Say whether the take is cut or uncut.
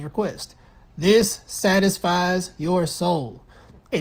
uncut